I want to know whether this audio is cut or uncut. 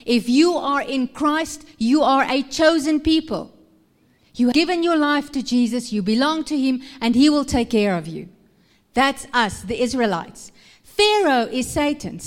cut